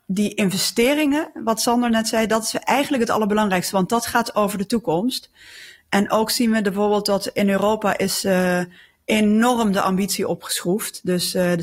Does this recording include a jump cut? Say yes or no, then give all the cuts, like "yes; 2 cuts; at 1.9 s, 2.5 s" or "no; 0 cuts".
no; 0 cuts